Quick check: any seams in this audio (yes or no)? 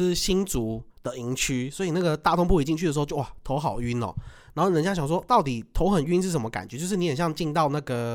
yes